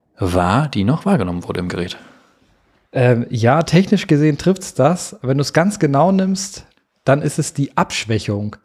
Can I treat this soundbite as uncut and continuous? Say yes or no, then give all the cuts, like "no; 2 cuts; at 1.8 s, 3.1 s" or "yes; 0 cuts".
yes; 0 cuts